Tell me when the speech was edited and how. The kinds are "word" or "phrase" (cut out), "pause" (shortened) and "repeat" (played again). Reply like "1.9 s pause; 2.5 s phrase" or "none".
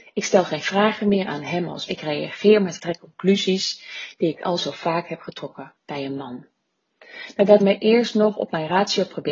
1.9 s word; 2.8 s phrase; 5.8 s pause; 7.6 s word